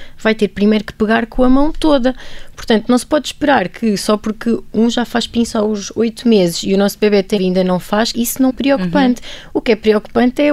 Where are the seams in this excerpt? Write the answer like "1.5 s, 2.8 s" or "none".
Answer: 7.4 s, 8.1 s, 8.5 s

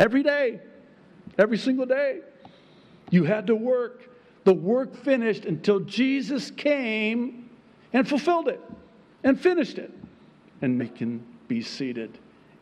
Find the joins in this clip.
4.9 s, 10.8 s

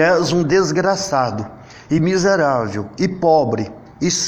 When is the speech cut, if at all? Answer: none

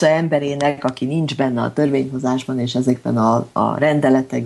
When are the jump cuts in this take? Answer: none

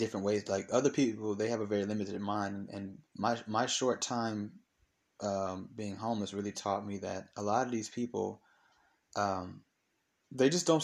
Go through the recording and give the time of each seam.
3.1 s

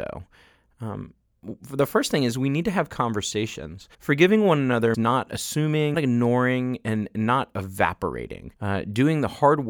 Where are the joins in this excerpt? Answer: 3.9 s, 4.9 s, 5.9 s, 8.6 s

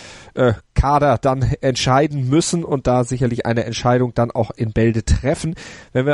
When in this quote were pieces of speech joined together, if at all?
none

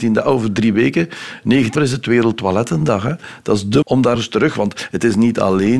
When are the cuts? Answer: 1.8 s, 3.8 s, 4.2 s

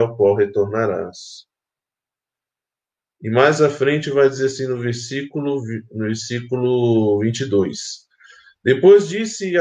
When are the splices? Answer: none

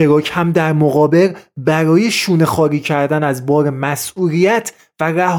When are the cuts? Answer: none

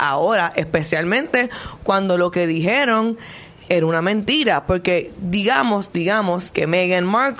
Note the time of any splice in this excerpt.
3.7 s

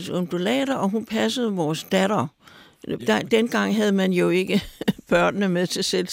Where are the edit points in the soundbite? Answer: none

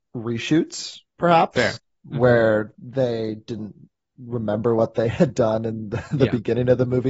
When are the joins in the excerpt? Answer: none

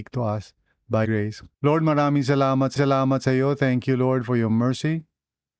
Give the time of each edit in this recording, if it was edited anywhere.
1.0 s, 1.5 s, 2.8 s

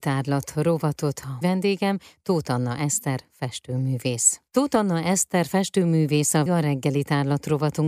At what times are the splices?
1.4 s, 4.5 s, 6.5 s

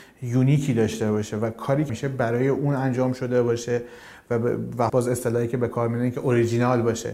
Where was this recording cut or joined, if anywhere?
1.9 s, 4.9 s

